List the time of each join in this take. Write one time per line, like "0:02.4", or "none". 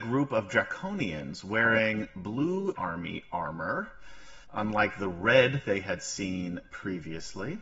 0:02.8
0:04.4